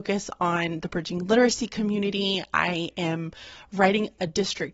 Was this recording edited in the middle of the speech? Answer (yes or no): no